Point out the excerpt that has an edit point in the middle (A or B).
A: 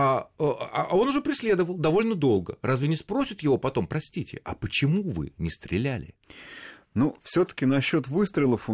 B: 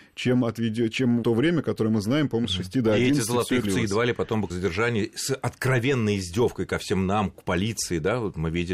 B